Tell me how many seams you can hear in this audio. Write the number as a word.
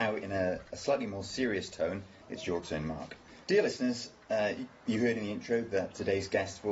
two